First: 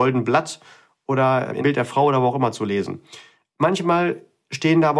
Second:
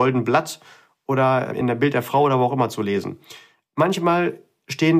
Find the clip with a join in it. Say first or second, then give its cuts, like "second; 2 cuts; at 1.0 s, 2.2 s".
first; 1 cut; at 1.6 s